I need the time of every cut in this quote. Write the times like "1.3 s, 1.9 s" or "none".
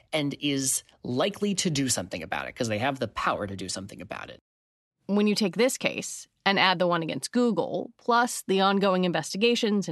none